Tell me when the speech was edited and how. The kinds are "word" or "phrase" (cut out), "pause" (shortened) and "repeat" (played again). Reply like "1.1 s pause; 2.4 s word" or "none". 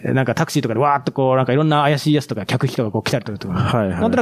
none